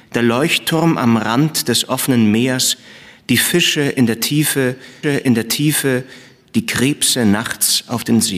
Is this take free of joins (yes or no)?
no